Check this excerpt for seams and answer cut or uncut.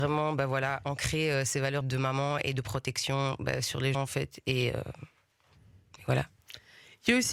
cut